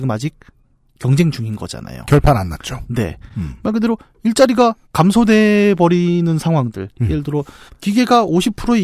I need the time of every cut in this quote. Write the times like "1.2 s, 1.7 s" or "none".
4.8 s, 7.7 s